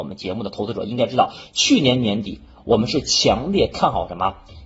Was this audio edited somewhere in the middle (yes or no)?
no